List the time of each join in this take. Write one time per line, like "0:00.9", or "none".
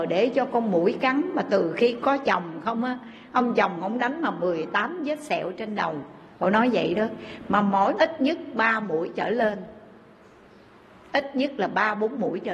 0:06.3
0:08.0